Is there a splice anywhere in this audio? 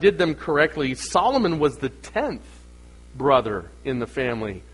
no; 0 cuts

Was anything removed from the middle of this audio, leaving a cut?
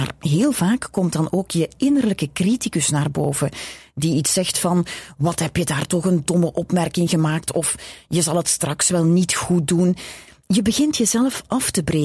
no; 0 cuts

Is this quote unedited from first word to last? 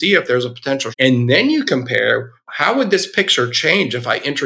no; 1 cut; at 0.9 s

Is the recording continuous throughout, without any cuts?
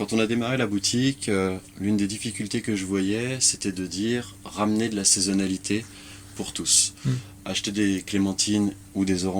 yes; 0 cuts

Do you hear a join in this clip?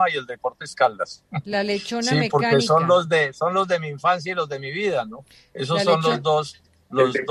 no; 0 cuts

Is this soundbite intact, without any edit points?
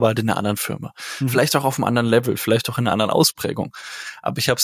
yes; 0 cuts

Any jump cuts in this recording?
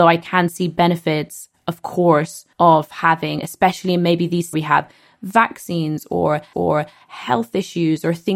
yes; 3 cuts; at 2.5 s, 4.5 s, 6.5 s

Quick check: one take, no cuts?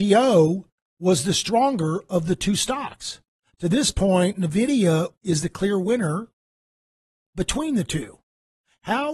yes; 0 cuts

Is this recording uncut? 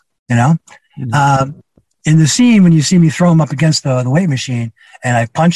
yes; 0 cuts

